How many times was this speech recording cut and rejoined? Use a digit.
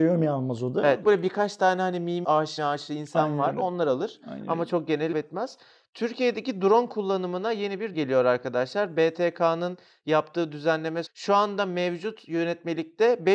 6